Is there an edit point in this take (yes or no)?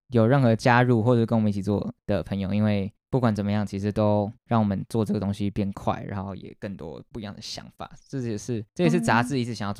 yes